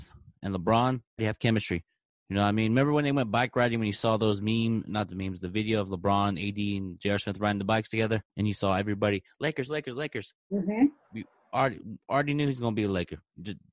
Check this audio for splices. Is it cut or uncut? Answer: cut